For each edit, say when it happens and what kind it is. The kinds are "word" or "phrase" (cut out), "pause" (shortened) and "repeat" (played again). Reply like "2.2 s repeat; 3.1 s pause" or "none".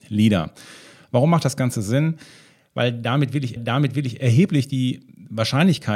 3.6 s repeat